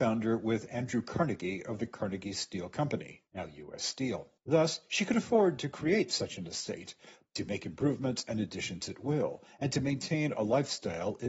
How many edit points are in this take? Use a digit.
2